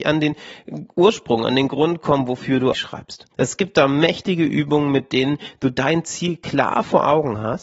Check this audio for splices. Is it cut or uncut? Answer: cut